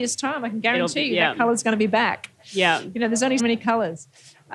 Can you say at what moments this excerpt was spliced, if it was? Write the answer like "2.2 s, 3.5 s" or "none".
3.4 s